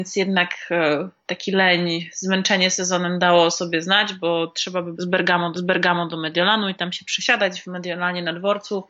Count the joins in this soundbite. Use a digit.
3